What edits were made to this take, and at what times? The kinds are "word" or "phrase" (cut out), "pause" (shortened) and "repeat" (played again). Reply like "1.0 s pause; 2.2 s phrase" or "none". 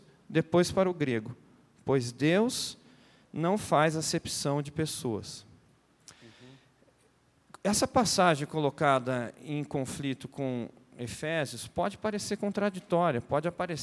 none